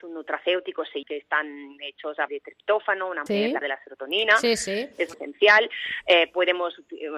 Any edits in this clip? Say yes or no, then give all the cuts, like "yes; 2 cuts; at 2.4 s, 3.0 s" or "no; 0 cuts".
yes; 5 cuts; at 1.0 s, 2.3 s, 3.3 s, 3.6 s, 5.1 s